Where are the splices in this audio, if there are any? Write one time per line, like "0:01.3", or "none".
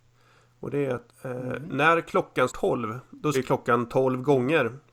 0:01.1
0:02.5
0:03.3